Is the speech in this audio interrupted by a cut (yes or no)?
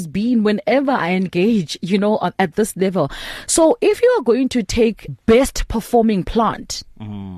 yes